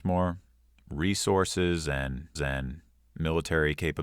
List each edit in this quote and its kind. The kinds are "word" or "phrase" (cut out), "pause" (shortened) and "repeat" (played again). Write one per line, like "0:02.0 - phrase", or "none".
0:02.4 - repeat